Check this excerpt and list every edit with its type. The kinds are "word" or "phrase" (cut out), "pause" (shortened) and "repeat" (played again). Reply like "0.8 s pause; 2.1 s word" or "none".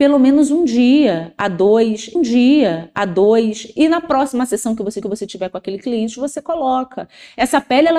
2.2 s repeat; 5.0 s repeat